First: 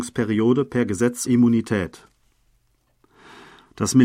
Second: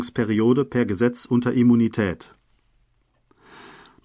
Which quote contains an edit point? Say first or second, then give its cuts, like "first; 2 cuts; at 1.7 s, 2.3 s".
first; 1 cut; at 1.3 s